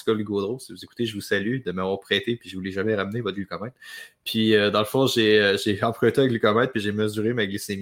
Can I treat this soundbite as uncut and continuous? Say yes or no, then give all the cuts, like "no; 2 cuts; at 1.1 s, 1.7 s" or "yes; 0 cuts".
yes; 0 cuts